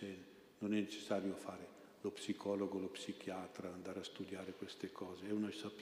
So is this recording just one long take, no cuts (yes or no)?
yes